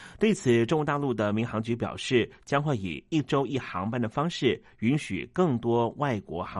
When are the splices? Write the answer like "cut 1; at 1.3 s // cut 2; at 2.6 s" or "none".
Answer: none